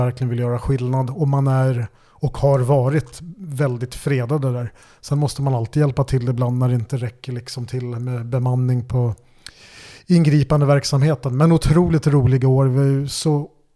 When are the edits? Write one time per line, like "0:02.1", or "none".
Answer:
none